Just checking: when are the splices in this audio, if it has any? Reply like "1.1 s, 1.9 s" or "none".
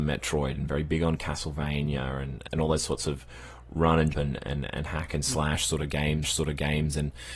2.5 s, 4.1 s, 6.2 s